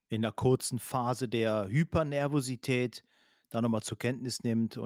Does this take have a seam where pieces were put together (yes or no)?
no